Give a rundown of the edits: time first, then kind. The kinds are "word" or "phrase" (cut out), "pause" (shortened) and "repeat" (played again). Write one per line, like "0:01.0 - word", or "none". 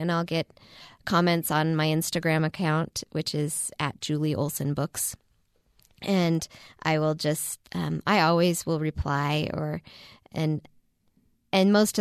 0:07.7 - pause